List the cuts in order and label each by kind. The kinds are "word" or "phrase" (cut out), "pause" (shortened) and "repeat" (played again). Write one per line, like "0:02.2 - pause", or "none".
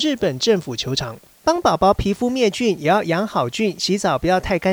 0:01.3 - pause